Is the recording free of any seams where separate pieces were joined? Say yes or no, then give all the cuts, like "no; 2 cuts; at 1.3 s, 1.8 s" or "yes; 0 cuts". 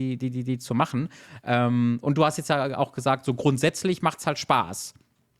yes; 0 cuts